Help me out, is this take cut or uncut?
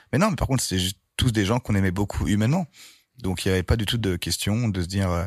uncut